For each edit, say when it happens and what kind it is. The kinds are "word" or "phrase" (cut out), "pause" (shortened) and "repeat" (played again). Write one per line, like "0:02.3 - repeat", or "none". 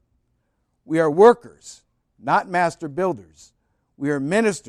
none